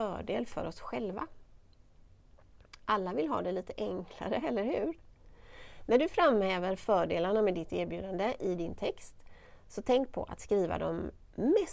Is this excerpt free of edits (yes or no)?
yes